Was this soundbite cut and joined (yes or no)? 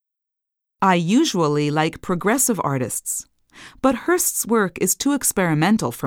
no